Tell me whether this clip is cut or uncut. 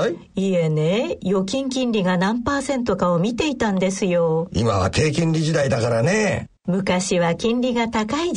cut